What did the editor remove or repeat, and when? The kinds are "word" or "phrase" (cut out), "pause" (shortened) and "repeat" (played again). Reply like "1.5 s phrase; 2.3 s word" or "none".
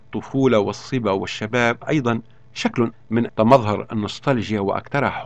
1.8 s word; 2.9 s word; 3.3 s word